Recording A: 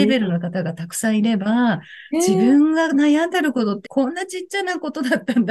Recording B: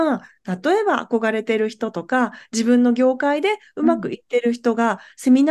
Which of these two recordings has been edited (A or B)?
A